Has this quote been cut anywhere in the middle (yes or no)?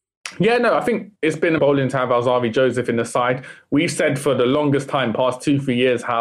yes